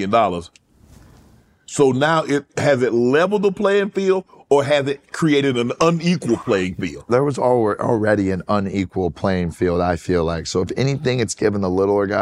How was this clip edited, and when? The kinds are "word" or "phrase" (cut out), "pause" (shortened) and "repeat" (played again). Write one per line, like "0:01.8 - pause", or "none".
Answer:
none